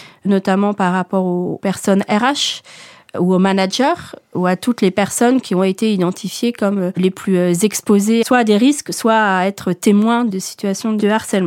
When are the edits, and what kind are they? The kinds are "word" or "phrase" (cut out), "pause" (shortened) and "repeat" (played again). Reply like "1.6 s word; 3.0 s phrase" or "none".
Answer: none